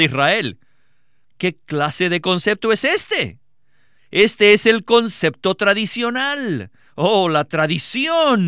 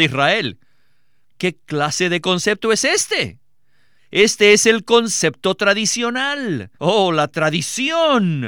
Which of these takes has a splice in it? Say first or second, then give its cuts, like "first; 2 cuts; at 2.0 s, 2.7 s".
second; 1 cut; at 6.7 s